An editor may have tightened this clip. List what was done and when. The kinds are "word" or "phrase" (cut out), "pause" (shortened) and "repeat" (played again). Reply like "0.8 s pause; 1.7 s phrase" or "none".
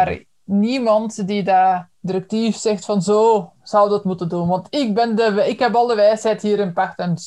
1.9 s pause